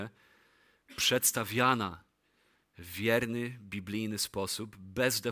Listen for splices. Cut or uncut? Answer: uncut